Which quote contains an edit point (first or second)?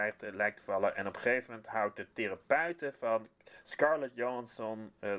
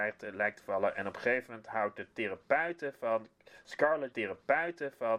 second